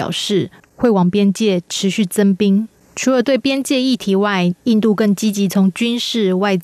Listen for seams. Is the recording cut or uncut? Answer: uncut